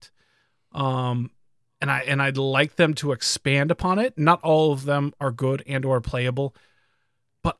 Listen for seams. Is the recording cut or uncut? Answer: uncut